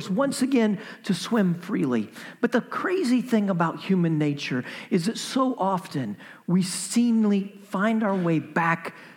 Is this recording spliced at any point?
no; 0 cuts

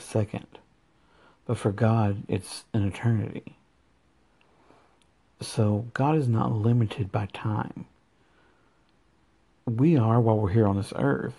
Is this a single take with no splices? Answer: yes; 0 cuts

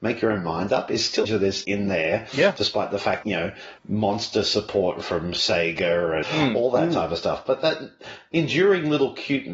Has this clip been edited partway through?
yes; 5 cuts; at 1.2 s, 1.6 s, 3.2 s, 3.8 s, 6.2 s

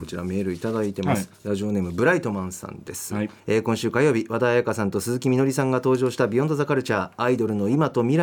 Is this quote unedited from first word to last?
no; 2 cuts; at 1.3 s, 3.4 s

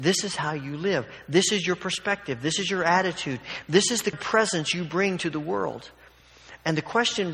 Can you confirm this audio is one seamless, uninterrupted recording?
no; 1 cut; at 4.1 s

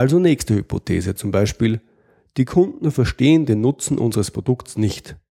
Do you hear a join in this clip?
no; 0 cuts

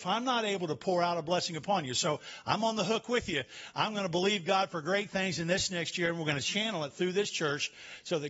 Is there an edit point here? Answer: no; 0 cuts

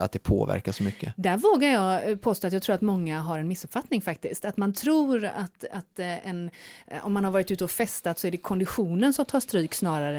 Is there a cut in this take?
no; 0 cuts

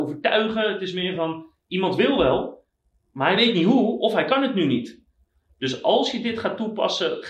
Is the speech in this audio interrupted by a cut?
no; 0 cuts

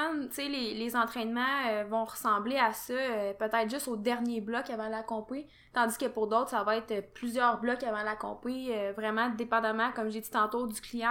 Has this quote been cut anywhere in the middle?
no; 0 cuts

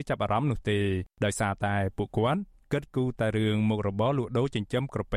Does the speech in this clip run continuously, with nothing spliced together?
yes; 0 cuts

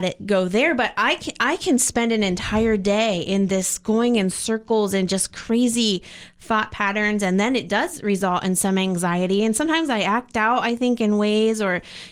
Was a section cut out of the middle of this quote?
no; 0 cuts

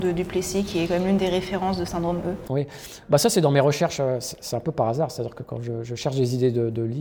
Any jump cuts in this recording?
no; 0 cuts

